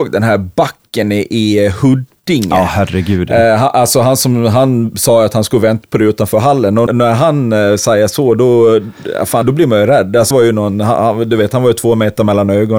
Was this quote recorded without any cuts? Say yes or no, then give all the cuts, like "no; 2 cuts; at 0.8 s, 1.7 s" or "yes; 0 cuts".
no; 3 cuts; at 6.9 s, 9.4 s, 10.3 s